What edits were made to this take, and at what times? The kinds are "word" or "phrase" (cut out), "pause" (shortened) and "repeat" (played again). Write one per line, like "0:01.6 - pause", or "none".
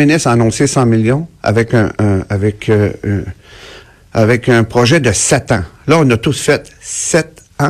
none